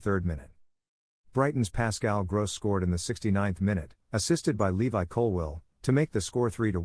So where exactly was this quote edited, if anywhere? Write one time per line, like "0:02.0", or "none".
none